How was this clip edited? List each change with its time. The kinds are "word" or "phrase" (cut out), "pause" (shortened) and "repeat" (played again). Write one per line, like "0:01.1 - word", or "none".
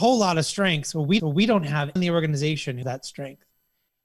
0:01.2 - repeat
0:02.0 - word
0:02.8 - word